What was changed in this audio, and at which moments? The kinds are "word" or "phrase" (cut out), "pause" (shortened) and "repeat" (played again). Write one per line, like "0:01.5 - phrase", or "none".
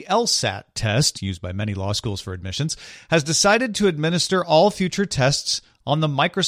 none